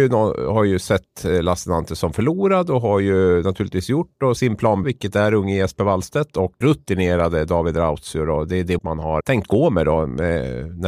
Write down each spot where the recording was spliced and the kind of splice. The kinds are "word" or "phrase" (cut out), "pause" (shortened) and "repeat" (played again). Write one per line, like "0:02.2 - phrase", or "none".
0:04.4 - word
0:04.8 - word
0:06.6 - word
0:08.8 - word
0:09.2 - word

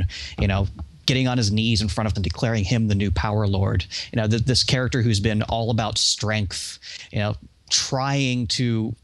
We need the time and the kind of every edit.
0:02.2 - word

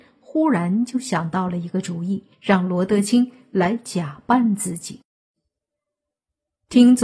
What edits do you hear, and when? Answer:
0:02.3 - pause

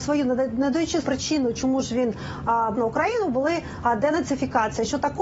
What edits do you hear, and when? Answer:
0:01.0 - word
0:02.7 - word

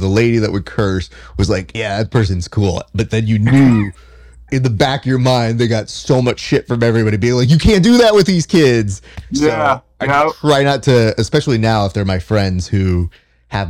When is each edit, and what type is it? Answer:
none

